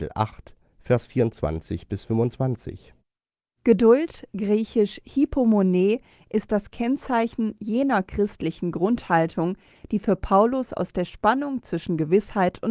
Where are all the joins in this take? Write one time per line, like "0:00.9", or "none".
none